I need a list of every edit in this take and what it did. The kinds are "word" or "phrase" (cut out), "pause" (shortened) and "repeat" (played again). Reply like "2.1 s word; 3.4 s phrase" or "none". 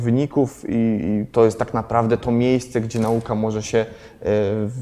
none